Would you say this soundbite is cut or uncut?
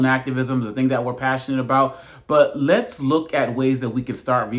uncut